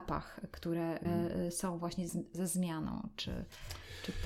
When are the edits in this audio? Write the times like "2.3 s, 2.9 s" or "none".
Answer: 1.0 s, 2.1 s